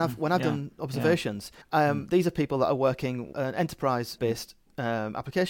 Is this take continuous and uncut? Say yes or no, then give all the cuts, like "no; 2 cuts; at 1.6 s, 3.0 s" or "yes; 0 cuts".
no; 3 cuts; at 1.6 s, 3.3 s, 4.2 s